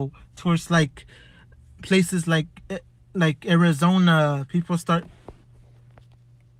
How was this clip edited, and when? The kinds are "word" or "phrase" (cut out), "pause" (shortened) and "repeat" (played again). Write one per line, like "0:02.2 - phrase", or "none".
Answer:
none